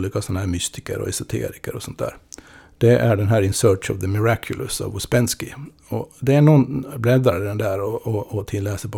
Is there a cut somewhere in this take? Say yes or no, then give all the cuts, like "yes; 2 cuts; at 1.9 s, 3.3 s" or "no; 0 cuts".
no; 0 cuts